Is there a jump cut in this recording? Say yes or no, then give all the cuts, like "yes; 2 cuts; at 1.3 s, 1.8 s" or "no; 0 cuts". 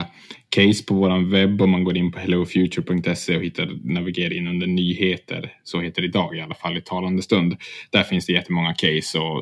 no; 0 cuts